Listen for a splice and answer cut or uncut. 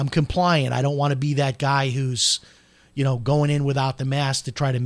uncut